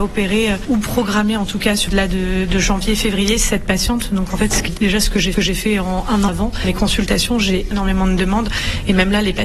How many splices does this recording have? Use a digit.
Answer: 5